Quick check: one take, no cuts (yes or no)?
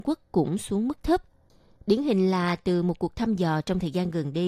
yes